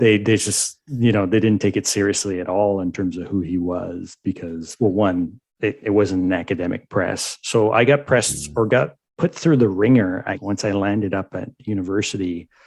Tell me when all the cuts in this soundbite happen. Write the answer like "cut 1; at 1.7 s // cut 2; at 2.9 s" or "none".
cut 1; at 5.5 s // cut 2; at 9.1 s // cut 3; at 10.3 s